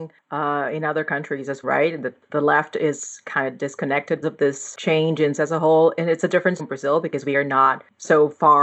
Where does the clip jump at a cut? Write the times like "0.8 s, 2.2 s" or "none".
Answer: 1.6 s, 2.3 s, 4.2 s, 5.4 s, 6.6 s